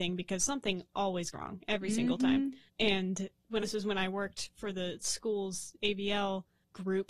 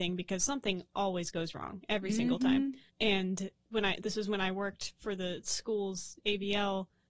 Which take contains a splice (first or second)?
first